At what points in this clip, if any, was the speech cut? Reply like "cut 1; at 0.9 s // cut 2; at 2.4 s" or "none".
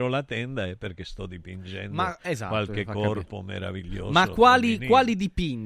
none